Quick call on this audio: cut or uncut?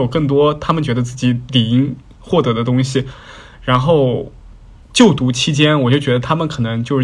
uncut